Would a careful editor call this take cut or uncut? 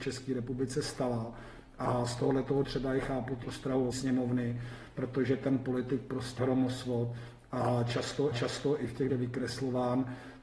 cut